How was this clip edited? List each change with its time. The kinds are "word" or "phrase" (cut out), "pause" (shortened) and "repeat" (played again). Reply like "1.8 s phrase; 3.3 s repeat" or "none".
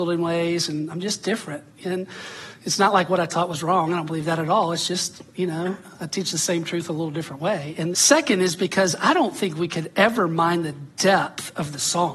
7.9 s word